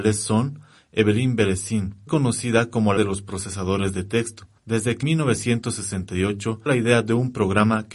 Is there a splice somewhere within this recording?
yes; 5 cuts; at 2.1 s, 3.0 s, 4.6 s, 5.0 s, 6.7 s

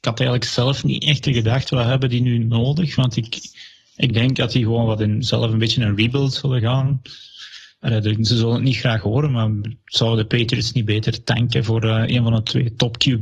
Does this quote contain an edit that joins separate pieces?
no; 0 cuts

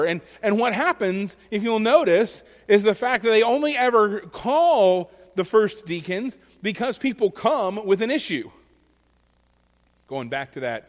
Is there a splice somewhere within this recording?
no; 0 cuts

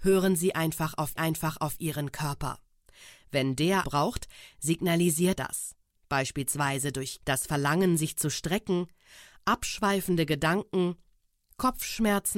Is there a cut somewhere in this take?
yes; 4 cuts; at 1.2 s, 3.8 s, 5.4 s, 7.2 s

